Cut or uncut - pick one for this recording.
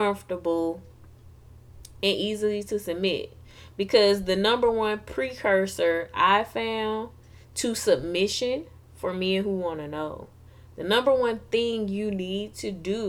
uncut